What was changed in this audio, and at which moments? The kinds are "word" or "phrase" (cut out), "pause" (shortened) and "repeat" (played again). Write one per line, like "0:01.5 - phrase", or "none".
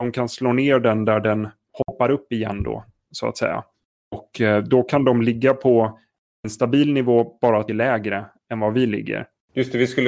0:07.7 - phrase

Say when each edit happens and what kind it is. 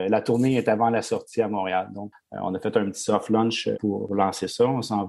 0:02.1 - word

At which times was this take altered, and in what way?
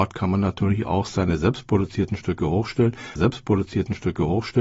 0:03.2 - repeat

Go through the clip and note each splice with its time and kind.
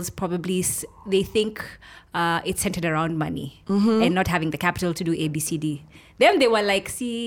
none

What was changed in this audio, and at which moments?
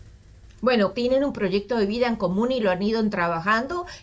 0:00.9 - word

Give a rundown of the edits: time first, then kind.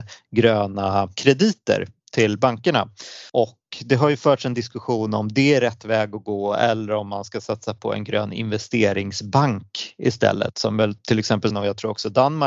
0:03.3 - pause
0:11.5 - word

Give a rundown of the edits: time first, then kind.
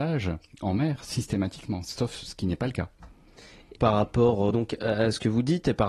0:03.8 - word
0:04.5 - word

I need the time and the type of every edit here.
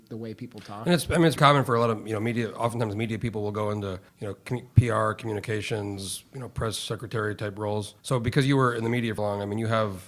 0:01.4 - word
0:04.1 - pause
0:08.0 - pause
0:09.2 - word

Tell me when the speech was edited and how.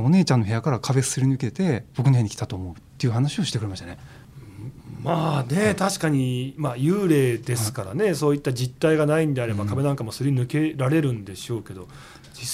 0:01.9 - pause
0:02.9 - pause

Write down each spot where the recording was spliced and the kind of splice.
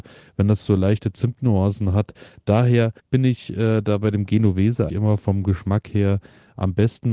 0:03.0 - pause
0:04.9 - word

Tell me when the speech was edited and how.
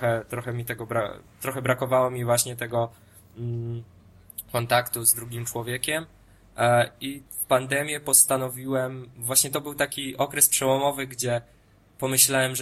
0:07.3 - pause

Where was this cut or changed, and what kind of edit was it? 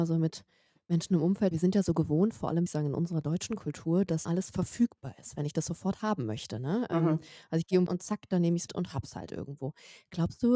0:01.5 - word
0:02.7 - word
0:04.3 - word
0:07.9 - word
0:08.7 - word

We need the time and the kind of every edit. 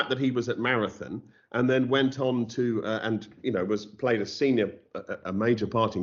none

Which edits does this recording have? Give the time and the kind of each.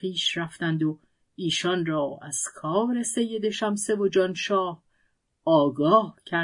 none

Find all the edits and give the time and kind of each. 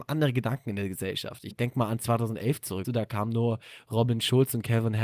0:01.5 - word
0:02.8 - word

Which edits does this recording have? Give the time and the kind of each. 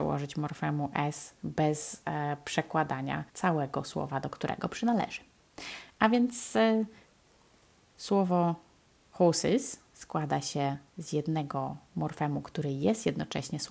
0:03.3 - pause
0:08.9 - pause
0:10.9 - pause

